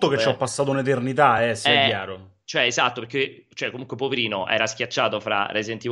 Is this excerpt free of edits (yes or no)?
yes